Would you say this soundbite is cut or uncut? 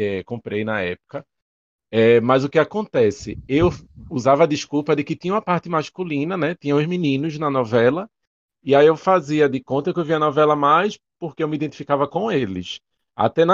uncut